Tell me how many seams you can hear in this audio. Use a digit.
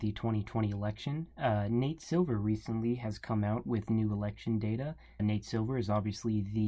1